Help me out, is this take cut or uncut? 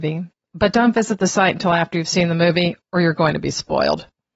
uncut